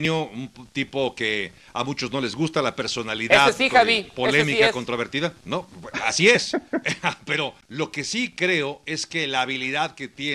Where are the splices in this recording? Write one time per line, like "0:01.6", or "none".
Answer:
0:05.4
0:07.6